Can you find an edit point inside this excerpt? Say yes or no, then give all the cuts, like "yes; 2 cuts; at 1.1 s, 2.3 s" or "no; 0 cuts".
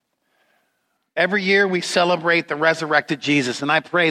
no; 0 cuts